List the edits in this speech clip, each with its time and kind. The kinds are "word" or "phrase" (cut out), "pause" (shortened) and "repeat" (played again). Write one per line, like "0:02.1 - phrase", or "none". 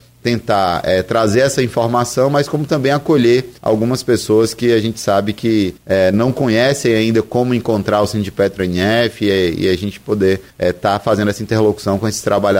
0:03.6 - pause
0:05.8 - pause
0:10.5 - pause